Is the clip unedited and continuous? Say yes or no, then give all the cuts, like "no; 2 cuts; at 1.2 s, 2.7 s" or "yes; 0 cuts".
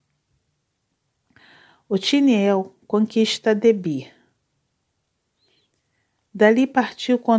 yes; 0 cuts